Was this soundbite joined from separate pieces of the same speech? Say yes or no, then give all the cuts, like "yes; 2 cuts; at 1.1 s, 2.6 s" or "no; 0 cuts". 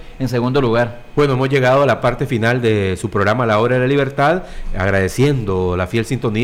no; 0 cuts